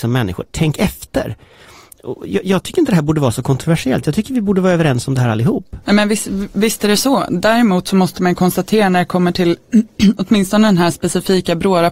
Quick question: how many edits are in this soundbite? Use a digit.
1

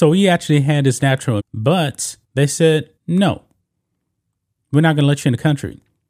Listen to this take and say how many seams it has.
3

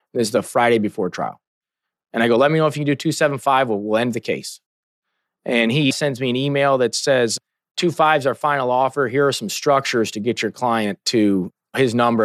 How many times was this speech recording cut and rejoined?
0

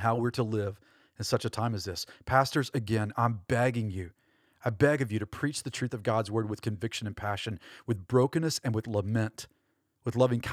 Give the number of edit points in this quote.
0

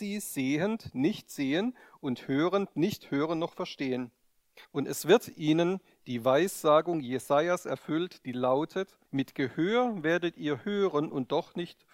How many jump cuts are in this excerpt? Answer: 2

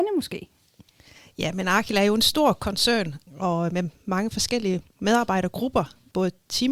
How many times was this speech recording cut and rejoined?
0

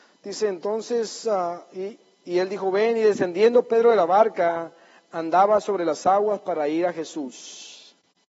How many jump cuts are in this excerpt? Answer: 0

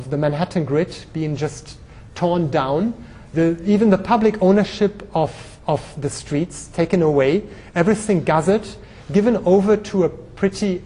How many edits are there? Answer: 1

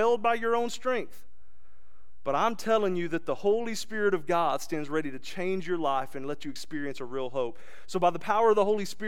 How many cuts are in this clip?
0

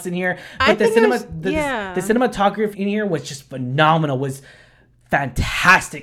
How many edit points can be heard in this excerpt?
1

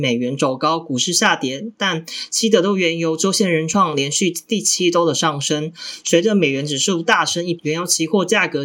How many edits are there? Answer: 1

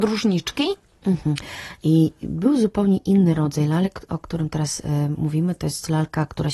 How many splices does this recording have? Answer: 0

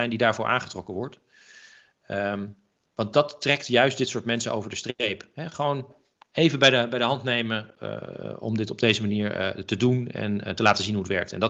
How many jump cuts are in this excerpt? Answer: 0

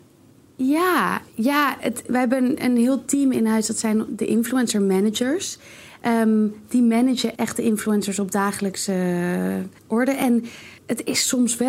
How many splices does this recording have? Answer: 4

